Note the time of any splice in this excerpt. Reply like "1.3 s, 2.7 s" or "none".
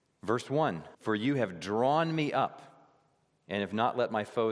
0.9 s